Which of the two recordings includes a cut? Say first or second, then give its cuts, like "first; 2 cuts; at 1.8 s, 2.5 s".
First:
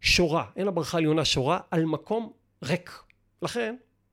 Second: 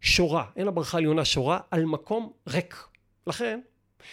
second; 1 cut; at 2.4 s